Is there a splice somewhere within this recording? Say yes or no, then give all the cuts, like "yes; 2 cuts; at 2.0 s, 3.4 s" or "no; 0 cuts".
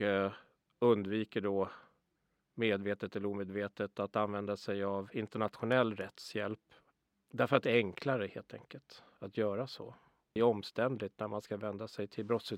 no; 0 cuts